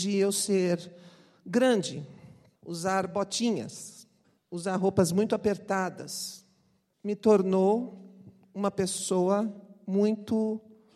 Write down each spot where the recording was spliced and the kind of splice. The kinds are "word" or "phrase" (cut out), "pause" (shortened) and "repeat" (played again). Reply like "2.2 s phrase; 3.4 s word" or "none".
none